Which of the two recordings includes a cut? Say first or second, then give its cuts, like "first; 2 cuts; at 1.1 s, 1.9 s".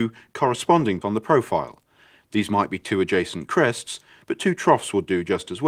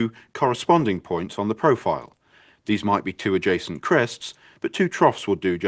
first; 1 cut; at 1.0 s